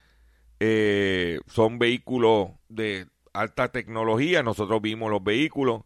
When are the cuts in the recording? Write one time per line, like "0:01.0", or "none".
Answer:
0:02.6